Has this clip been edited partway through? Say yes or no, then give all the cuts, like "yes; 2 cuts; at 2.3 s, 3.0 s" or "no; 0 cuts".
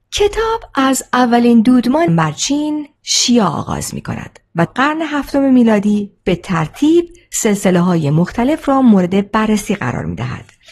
yes; 3 cuts; at 2.1 s, 3.0 s, 4.7 s